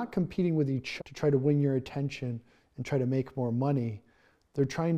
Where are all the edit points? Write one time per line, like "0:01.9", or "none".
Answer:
0:01.0

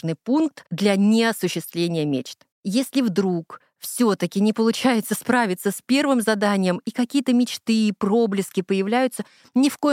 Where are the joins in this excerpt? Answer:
0:02.5

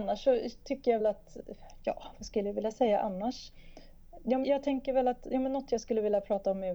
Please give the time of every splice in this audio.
0:01.0
0:04.4

